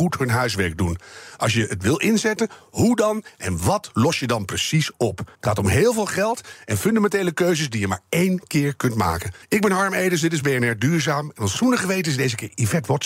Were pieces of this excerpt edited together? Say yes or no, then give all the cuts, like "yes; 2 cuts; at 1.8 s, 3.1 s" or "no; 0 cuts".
yes; 2 cuts; at 5.3 s, 9.4 s